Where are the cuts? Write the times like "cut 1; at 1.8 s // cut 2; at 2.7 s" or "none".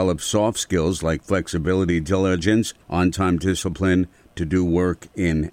cut 1; at 2.8 s